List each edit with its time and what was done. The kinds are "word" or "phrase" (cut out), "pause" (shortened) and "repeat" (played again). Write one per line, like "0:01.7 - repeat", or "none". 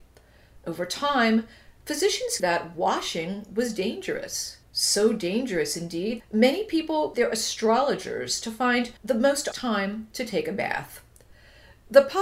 0:02.4 - phrase
0:04.6 - pause
0:06.2 - word
0:07.1 - word
0:09.0 - pause
0:09.5 - word